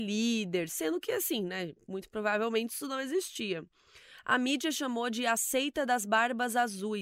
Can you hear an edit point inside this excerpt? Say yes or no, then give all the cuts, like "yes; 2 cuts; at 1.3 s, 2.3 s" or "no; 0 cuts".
no; 0 cuts